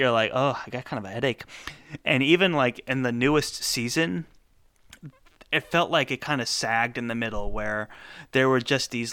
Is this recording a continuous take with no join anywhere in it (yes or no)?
yes